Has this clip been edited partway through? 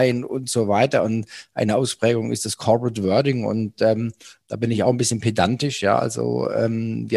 no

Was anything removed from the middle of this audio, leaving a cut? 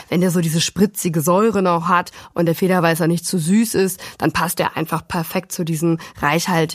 no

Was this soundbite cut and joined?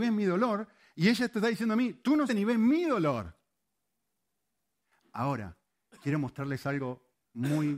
yes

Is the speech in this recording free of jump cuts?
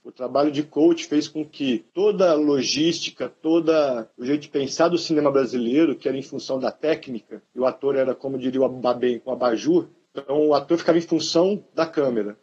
no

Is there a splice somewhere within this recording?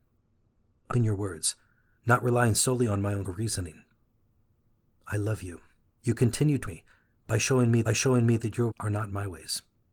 yes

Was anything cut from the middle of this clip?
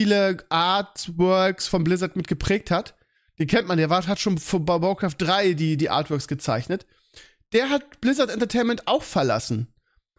no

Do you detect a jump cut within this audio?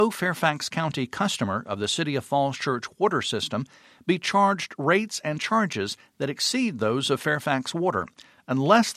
no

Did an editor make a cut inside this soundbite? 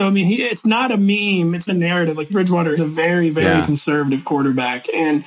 yes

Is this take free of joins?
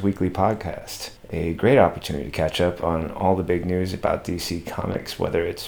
no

